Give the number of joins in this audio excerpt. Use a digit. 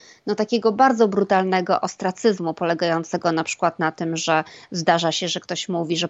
0